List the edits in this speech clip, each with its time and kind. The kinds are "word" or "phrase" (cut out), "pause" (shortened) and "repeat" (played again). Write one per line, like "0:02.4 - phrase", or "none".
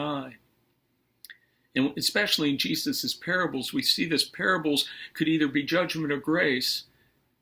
none